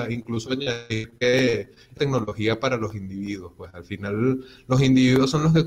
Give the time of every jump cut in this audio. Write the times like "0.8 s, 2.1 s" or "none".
2.0 s